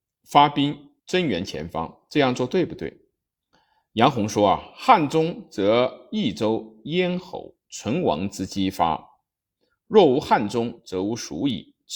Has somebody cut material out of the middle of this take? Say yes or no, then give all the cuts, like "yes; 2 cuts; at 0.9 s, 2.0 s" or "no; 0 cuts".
yes; 2 cuts; at 1.0 s, 3.4 s